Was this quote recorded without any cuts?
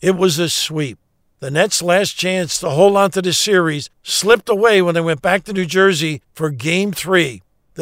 yes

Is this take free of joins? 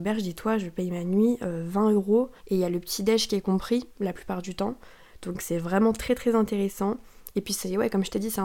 no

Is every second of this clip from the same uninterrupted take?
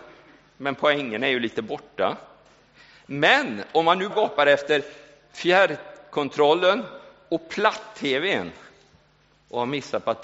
no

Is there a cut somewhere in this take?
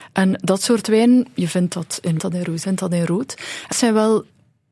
yes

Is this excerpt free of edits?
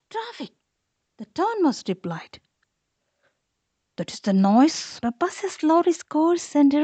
no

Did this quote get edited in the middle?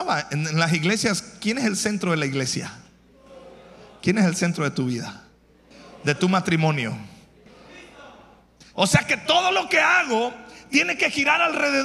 no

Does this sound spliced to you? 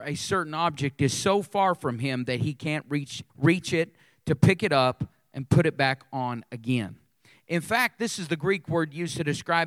yes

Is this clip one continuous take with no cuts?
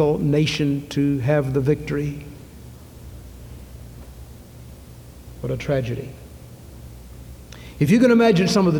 yes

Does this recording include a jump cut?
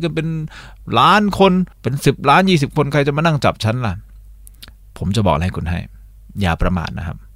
yes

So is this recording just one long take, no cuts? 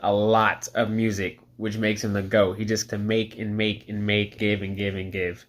no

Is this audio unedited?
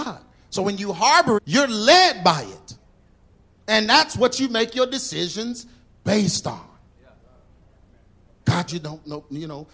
no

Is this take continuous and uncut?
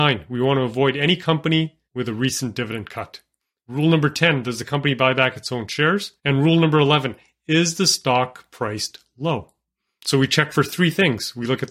no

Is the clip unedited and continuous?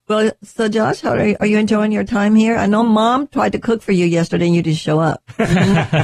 yes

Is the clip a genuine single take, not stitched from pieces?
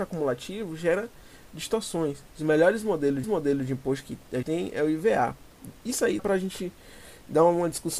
no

